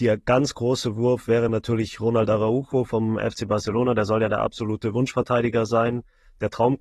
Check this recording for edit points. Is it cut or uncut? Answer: uncut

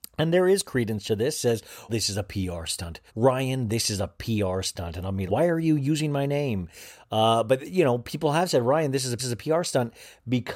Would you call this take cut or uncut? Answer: cut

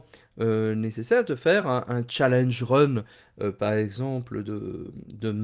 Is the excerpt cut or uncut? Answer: uncut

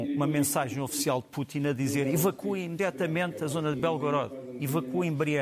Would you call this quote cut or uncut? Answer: uncut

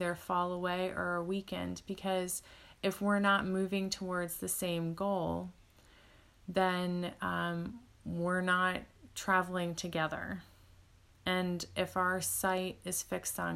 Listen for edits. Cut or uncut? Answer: uncut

